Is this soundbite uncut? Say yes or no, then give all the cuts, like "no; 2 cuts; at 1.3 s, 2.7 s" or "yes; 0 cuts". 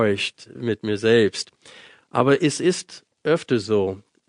yes; 0 cuts